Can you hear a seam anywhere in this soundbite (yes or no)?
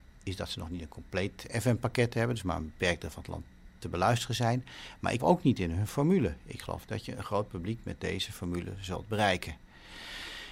yes